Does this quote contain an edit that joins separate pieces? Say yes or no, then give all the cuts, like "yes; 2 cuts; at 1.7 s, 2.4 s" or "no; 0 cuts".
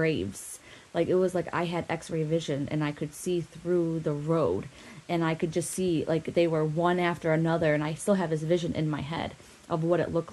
no; 0 cuts